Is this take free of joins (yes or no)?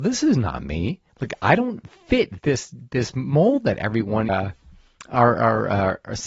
no